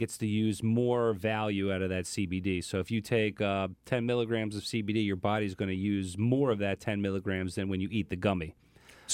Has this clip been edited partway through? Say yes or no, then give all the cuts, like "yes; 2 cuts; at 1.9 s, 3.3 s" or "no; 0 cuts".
no; 0 cuts